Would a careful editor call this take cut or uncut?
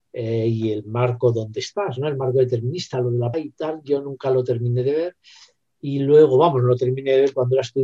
cut